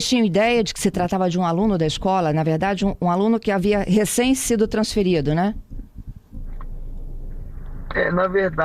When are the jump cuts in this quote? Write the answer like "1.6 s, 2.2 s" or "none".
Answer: none